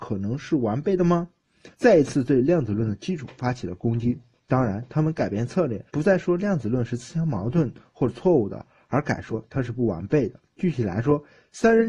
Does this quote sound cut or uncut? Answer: cut